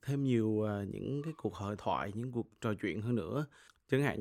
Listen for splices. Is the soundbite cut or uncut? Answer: uncut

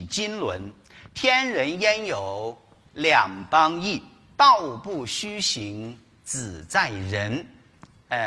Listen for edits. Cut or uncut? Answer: uncut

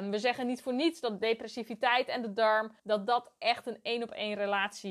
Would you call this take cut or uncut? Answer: cut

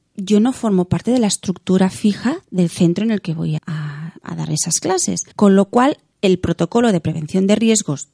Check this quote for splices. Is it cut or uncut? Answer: cut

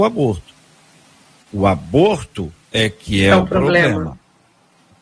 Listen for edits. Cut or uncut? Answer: cut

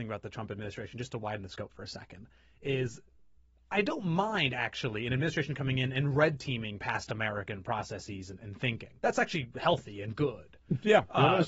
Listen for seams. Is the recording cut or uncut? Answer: cut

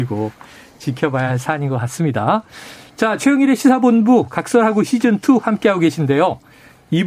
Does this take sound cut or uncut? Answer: uncut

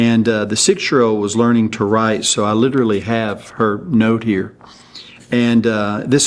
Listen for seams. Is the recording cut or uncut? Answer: uncut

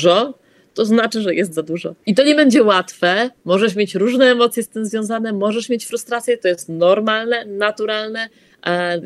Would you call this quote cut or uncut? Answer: cut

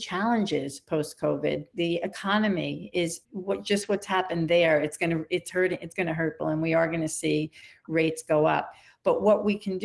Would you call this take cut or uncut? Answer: cut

